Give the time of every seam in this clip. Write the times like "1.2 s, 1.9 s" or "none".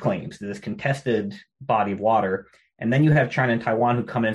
none